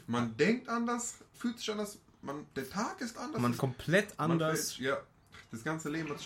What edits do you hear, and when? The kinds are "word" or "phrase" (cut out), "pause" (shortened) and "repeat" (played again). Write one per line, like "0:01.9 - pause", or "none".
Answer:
0:01.3 - word
0:02.5 - pause
0:03.1 - word
0:03.6 - phrase